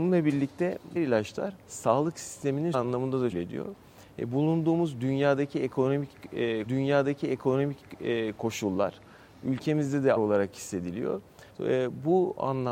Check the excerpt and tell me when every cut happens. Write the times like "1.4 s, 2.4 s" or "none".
1.0 s, 1.6 s, 2.7 s, 3.3 s, 6.7 s, 10.2 s, 11.5 s